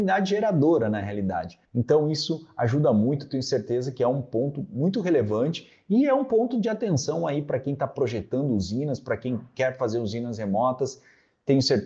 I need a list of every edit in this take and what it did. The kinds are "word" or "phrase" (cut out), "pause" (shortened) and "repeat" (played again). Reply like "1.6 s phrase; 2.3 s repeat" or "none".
1.6 s pause